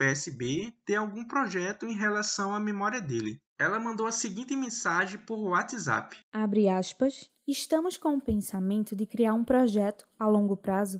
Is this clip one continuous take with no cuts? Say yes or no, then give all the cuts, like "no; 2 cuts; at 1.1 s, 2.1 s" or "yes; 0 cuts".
no; 3 cuts; at 3.5 s, 6.2 s, 7.4 s